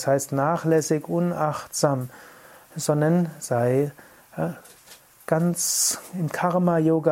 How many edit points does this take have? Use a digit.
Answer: 0